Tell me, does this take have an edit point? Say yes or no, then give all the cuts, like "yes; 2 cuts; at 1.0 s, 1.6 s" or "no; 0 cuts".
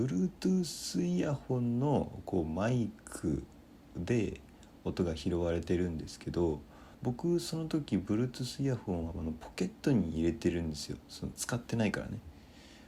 yes; 1 cut; at 6.9 s